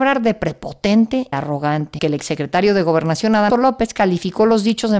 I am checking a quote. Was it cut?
yes; 3 cuts; at 1.3 s, 2.0 s, 3.5 s

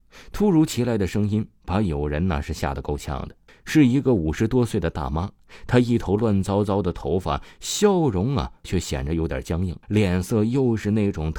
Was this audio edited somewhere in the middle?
yes; 3 cuts; at 3.5 s, 8.6 s, 9.8 s

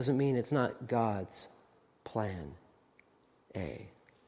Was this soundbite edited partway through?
no; 0 cuts

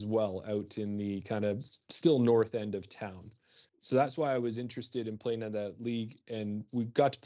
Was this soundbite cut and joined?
yes; 1 cut; at 3.7 s

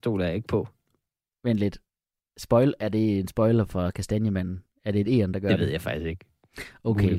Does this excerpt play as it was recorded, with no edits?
yes; 0 cuts

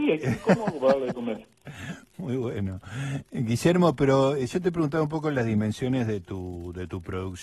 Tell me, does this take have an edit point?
no; 0 cuts

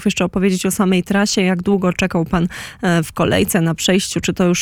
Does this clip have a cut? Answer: no; 0 cuts

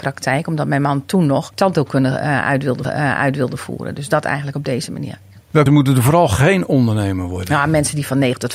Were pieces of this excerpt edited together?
yes; 3 cuts; at 1.5 s, 2.8 s, 5.7 s

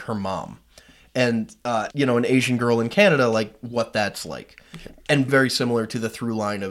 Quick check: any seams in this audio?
yes; 2 cuts; at 1.9 s, 5.3 s

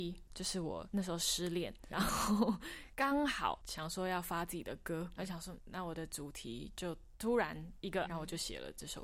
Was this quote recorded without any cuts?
no; 4 cuts; at 1.9 s, 5.2 s, 5.6 s, 8.0 s

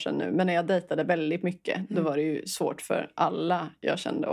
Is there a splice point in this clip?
no; 0 cuts

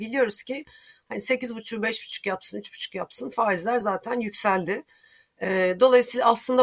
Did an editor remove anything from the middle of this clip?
no; 0 cuts

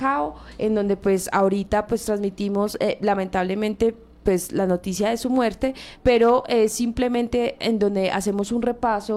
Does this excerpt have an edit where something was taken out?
no; 0 cuts

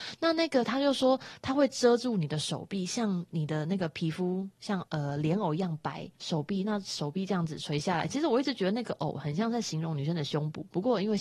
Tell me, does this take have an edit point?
yes; 2 cuts; at 4.9 s, 6.1 s

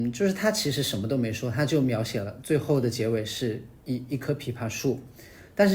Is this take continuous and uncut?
no; 1 cut; at 3.8 s

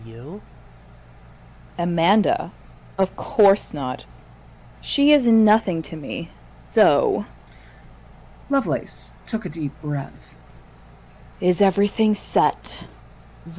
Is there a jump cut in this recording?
no; 0 cuts

